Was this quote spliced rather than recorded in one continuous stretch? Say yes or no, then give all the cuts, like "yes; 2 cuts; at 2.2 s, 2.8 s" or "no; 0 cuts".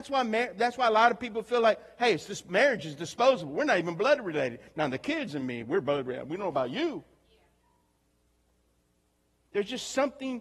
no; 0 cuts